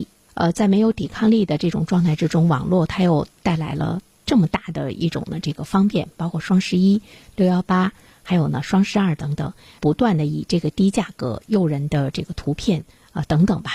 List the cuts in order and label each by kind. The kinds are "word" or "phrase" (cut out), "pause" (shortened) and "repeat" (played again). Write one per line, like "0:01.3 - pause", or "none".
none